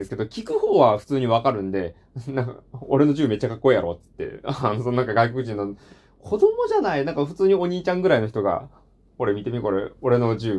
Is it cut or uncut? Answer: uncut